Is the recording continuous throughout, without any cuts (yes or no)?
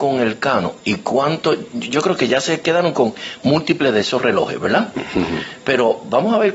yes